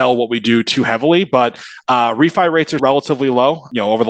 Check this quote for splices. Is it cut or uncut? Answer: cut